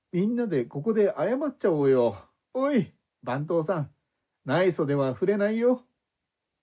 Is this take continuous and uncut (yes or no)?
no